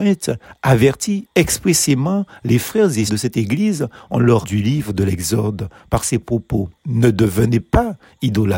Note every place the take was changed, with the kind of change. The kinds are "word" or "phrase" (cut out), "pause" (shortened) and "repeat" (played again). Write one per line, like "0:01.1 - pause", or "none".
0:03.1 - word
0:04.4 - phrase

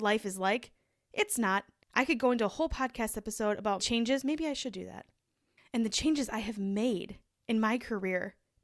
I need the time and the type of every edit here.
0:03.8 - phrase

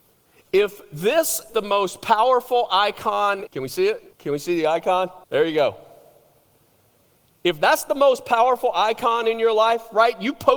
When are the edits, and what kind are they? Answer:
0:01.5 - word
0:03.5 - phrase
0:04.1 - pause
0:05.2 - pause

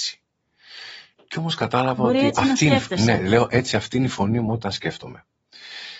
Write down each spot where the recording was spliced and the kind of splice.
none

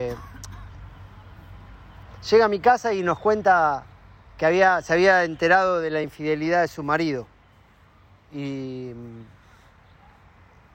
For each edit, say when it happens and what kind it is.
none

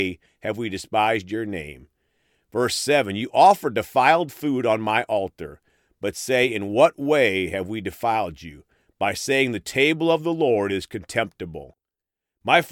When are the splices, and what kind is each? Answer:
none

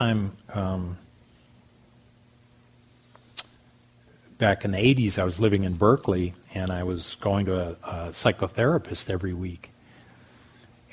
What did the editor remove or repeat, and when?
0:06.4 - pause

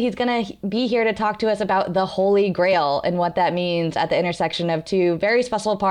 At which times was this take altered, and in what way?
none

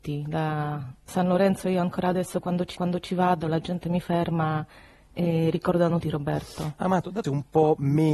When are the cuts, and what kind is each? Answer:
0:01.1 - word
0:02.7 - repeat
0:06.0 - word
0:07.2 - phrase

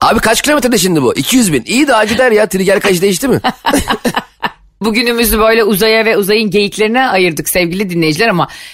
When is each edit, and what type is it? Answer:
0:04.8 - word

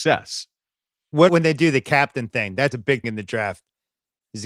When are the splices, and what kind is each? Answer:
0:01.3 - word
0:02.7 - word
0:03.0 - word

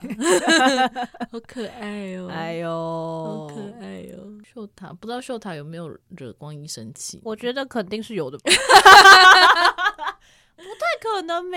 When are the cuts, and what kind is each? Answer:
0:06.0 - pause

